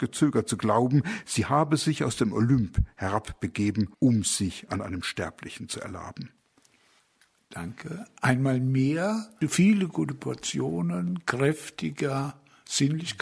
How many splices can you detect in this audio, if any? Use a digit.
1